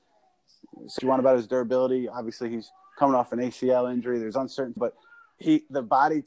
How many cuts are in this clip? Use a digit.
2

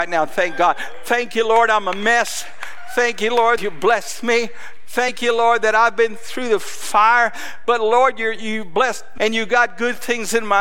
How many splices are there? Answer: 2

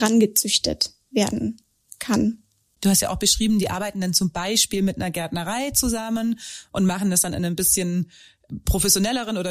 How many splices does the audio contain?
0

